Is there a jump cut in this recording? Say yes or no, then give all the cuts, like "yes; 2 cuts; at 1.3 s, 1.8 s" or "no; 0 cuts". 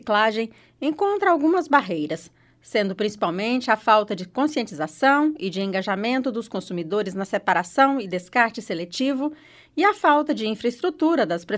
no; 0 cuts